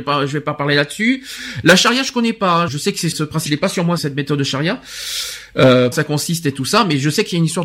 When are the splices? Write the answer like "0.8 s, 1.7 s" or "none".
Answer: 2.7 s, 3.1 s, 3.5 s, 4.0 s, 5.9 s